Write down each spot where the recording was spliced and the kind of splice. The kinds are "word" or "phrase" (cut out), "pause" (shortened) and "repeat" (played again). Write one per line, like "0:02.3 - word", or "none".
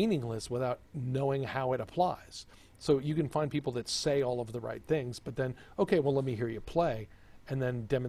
none

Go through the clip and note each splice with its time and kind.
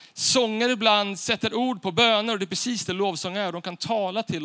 none

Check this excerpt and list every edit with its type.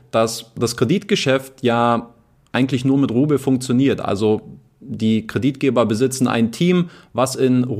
none

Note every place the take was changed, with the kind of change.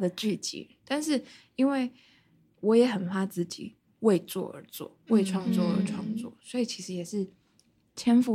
none

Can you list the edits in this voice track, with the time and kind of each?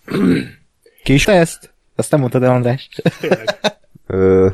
0:01.2 - word

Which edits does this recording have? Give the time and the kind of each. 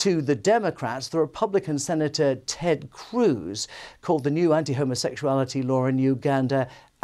none

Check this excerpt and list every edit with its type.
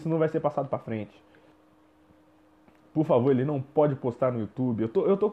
none

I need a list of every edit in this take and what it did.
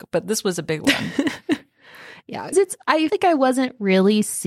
0:02.5 - word
0:03.1 - word

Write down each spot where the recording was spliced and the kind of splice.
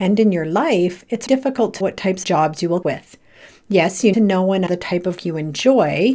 0:01.3 - word
0:01.8 - word
0:02.2 - word
0:02.8 - word
0:04.1 - word
0:04.7 - word
0:05.2 - word

